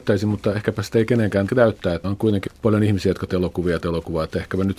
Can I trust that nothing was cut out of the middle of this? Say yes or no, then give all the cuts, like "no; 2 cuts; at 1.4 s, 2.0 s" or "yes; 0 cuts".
no; 5 cuts; at 1.5 s, 2.0 s, 2.5 s, 3.3 s, 3.8 s